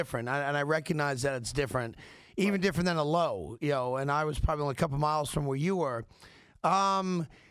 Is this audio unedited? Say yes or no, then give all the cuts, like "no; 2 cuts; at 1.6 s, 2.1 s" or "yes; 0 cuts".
yes; 0 cuts